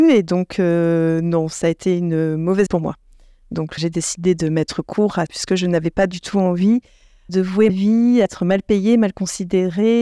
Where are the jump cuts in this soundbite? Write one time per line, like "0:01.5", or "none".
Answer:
0:02.7
0:03.8
0:05.3
0:07.3
0:07.7
0:08.3